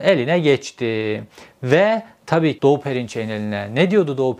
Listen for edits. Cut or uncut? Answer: cut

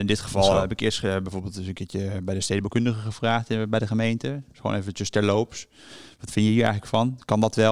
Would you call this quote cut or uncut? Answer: uncut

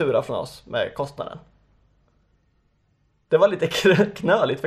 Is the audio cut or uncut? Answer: uncut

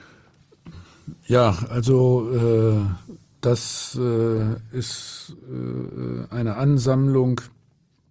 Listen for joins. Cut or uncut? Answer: uncut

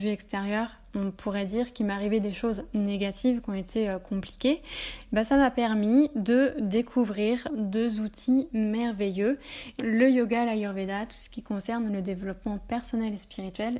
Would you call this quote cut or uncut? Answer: cut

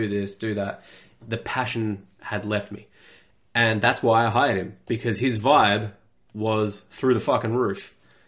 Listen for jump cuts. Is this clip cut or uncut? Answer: uncut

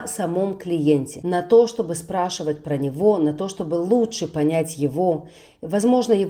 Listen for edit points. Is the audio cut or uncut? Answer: uncut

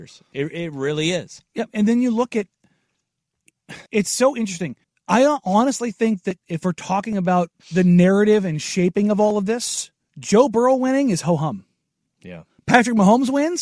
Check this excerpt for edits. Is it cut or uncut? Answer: cut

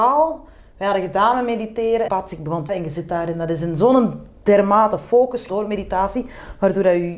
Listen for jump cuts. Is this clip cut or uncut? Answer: cut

